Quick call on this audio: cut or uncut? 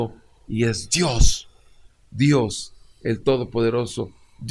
uncut